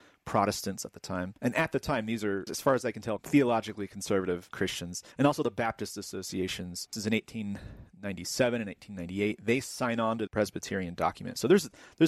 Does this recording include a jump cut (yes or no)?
yes